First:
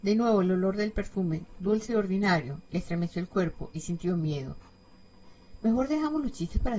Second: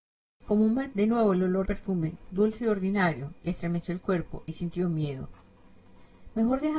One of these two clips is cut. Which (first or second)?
second